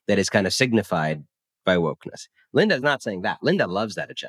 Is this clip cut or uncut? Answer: uncut